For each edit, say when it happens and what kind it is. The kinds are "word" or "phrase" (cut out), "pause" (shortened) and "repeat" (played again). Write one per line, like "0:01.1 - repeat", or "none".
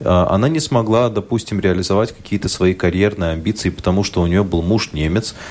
none